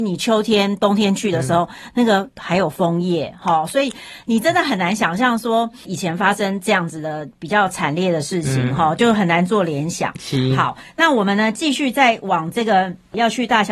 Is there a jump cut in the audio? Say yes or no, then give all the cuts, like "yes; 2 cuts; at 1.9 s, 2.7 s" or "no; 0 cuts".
yes; 1 cut; at 5.8 s